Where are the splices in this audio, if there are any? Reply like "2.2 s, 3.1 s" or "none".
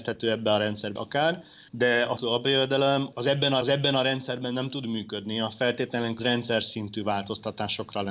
1.0 s, 1.7 s, 2.2 s, 3.1 s, 3.6 s, 6.2 s